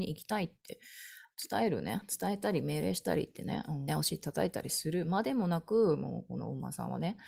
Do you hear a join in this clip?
yes; 1 cut; at 3.9 s

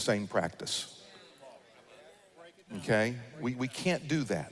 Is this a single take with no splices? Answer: yes; 0 cuts

